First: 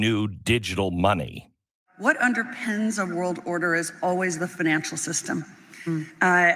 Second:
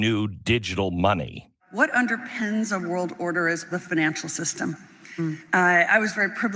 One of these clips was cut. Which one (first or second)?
second